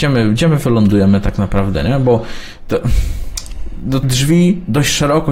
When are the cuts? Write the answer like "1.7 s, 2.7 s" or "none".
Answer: 4.0 s